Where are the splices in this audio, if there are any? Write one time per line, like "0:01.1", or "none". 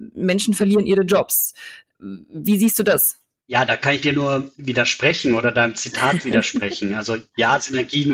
none